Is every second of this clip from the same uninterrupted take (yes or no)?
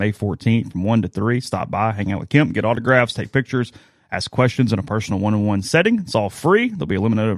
yes